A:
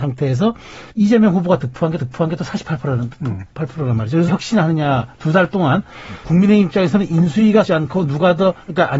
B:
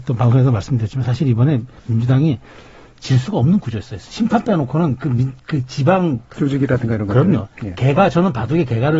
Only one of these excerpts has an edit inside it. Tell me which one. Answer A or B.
A